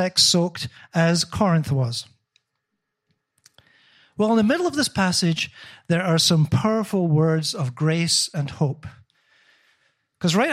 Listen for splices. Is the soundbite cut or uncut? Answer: uncut